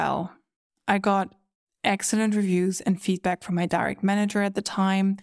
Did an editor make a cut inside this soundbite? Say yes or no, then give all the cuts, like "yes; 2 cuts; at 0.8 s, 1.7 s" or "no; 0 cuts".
no; 0 cuts